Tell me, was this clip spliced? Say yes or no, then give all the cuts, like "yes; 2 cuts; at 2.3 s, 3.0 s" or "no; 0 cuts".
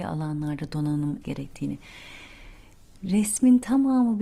yes; 1 cut; at 1.2 s